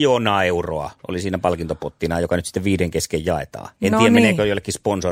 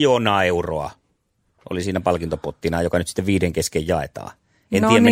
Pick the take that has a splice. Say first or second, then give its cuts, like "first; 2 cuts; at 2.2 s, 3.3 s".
first; 2 cuts; at 1.0 s, 3.7 s